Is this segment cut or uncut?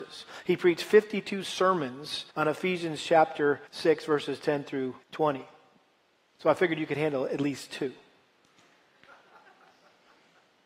cut